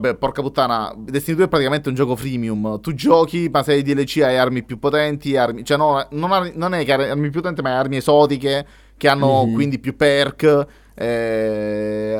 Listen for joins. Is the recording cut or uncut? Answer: uncut